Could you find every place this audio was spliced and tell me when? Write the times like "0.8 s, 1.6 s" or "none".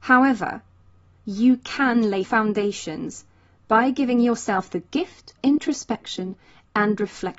2.2 s, 5.4 s